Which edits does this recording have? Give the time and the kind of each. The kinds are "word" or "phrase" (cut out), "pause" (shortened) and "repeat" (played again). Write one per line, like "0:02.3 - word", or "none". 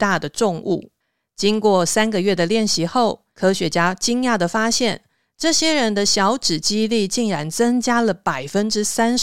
0:01.0 - pause